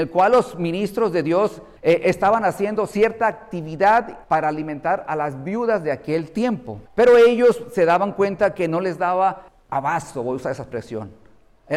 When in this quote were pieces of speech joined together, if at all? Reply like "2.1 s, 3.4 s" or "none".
1.8 s, 4.2 s, 6.9 s, 9.5 s